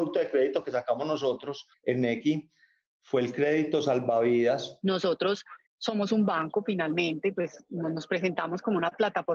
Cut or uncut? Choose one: cut